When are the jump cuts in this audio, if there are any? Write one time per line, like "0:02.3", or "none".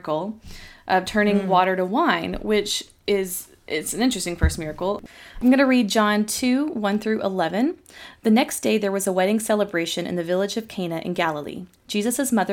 none